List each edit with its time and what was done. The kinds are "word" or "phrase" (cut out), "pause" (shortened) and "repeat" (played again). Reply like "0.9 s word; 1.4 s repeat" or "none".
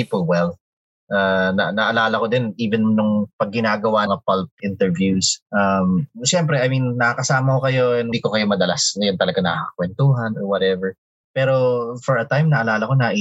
4.1 s phrase; 4.6 s word; 5.5 s pause; 8.1 s phrase; 11.2 s pause